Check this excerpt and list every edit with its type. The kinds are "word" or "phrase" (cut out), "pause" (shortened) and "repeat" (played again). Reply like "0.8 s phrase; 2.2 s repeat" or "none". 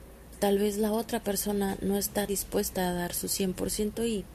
2.3 s word